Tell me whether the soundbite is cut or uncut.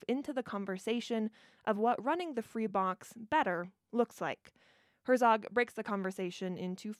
uncut